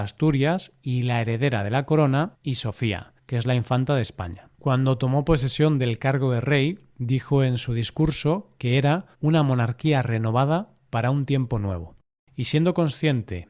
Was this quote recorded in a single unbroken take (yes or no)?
no